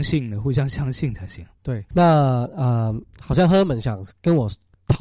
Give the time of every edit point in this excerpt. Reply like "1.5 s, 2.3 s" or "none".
1.9 s